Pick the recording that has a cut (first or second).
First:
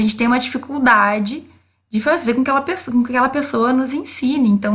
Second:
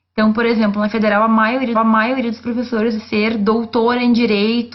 second